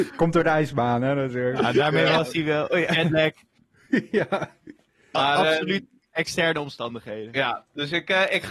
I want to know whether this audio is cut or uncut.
cut